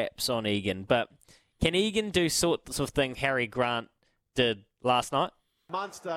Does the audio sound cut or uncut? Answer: cut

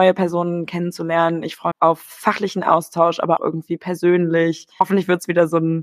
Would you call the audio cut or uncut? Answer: cut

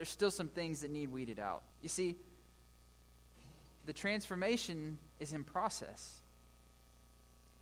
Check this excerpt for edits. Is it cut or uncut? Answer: cut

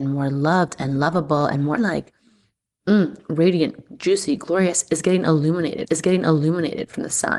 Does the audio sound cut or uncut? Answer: cut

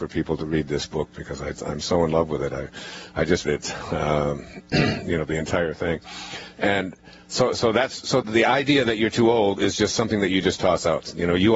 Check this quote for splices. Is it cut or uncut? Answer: cut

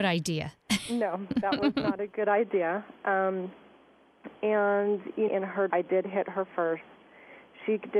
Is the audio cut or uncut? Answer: cut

